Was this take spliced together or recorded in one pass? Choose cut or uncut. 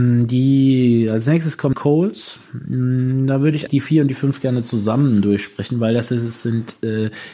cut